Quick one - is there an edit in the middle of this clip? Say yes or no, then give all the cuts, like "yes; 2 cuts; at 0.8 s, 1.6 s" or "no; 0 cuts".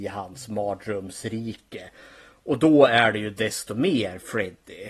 no; 0 cuts